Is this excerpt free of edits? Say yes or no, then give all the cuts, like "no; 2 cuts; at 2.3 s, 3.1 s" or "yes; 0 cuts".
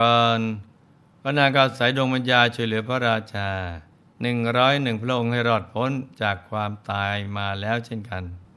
no; 1 cut; at 3.9 s